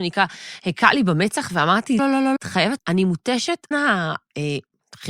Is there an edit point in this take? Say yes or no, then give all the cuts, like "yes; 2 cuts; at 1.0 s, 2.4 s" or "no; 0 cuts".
yes; 4 cuts; at 2.0 s, 2.4 s, 2.8 s, 3.7 s